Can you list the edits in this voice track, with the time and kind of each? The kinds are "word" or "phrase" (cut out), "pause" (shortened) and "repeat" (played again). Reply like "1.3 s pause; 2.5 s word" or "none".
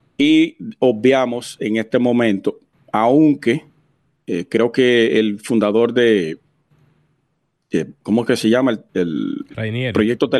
none

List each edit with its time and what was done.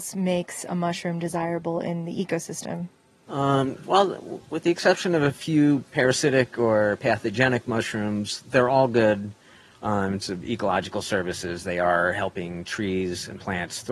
10.2 s word

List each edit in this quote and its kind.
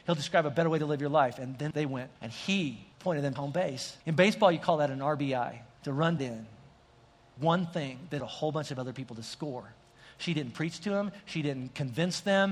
1.7 s word; 2.2 s pause; 2.9 s pause; 3.4 s word; 4.0 s pause; 5.7 s pause; 6.2 s word; 7.4 s phrase; 8.2 s word

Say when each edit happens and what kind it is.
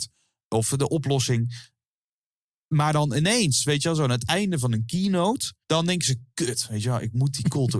5.6 s pause

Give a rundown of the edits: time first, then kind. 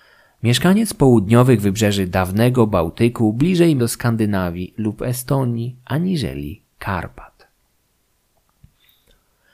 3.8 s word

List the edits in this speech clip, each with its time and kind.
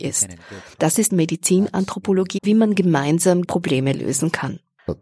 1.1 s word; 2.4 s word; 3.4 s word

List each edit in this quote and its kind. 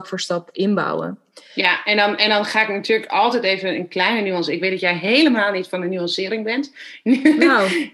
none

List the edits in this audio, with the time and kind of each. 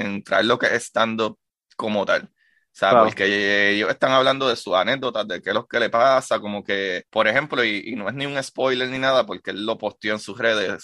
7.1 s pause

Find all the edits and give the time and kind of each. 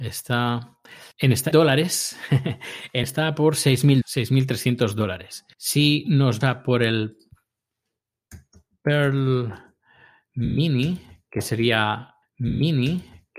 1.1 s pause; 1.5 s word; 3.0 s word; 4.0 s word; 5.5 s pause; 6.4 s word; 12.2 s repeat

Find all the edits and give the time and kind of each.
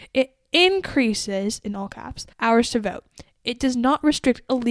2.3 s pause

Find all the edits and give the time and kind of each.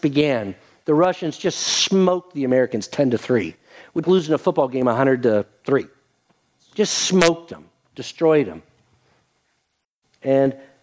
4.0 s word

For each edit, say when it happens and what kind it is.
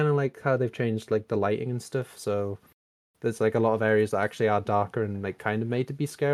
none

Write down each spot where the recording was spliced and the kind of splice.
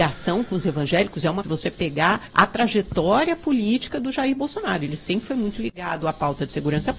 1.4 s phrase; 2.3 s pause

